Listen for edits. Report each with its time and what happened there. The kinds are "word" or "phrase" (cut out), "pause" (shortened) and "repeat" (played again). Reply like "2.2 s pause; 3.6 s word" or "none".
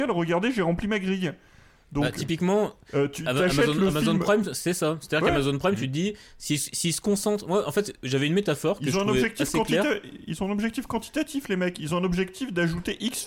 none

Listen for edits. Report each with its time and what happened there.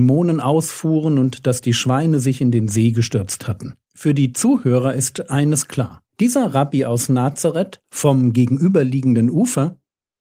3.8 s pause; 6.1 s pause; 7.8 s pause

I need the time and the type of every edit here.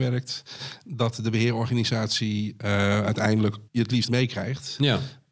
3.7 s pause; 4.1 s phrase

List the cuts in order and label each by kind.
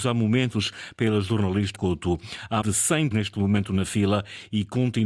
1.7 s word; 2.6 s word; 3.1 s word

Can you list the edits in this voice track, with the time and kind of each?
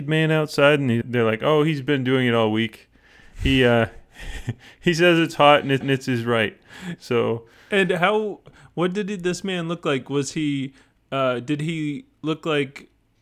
1.0 s word; 5.8 s repeat

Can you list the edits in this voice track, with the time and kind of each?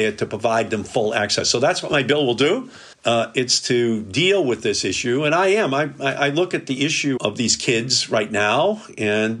2.9 s pause; 7.2 s word

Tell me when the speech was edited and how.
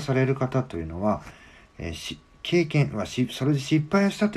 none

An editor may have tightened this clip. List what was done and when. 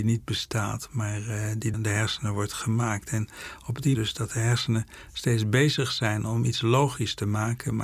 1.7 s word; 3.9 s phrase

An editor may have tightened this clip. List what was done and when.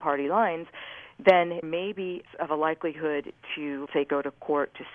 1.6 s word; 2.3 s word; 3.9 s word

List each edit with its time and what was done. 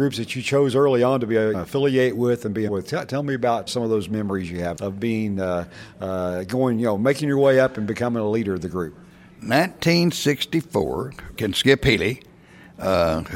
1.5 s word; 2.7 s word; 3.7 s word; 4.8 s word; 11.4 s word

